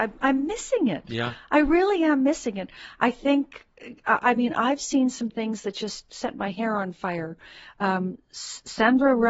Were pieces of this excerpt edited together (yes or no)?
no